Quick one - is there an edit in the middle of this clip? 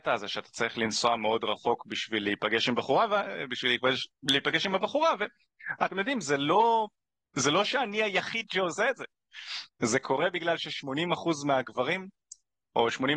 no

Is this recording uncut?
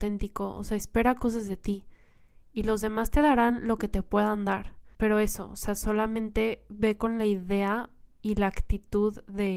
no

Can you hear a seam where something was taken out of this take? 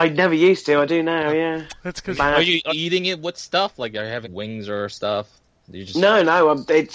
yes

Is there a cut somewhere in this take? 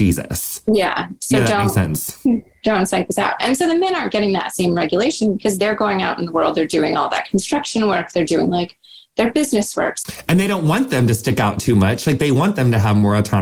no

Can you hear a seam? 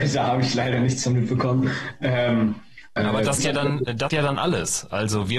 yes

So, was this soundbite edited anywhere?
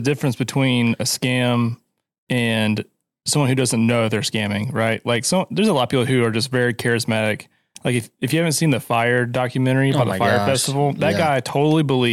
no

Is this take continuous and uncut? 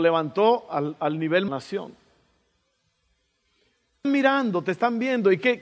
no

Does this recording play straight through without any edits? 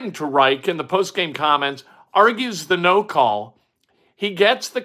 yes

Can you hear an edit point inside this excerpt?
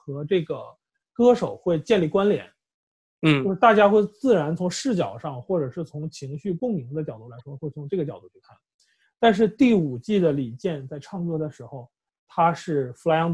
no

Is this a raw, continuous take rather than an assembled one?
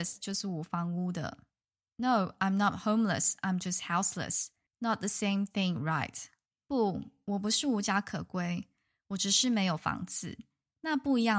yes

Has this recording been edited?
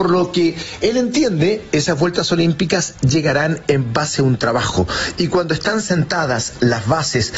no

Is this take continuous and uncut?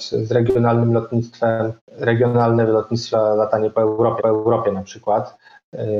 no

